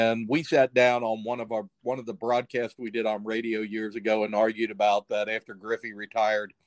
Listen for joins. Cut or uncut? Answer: uncut